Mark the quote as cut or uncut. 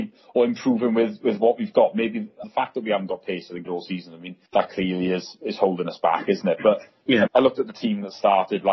cut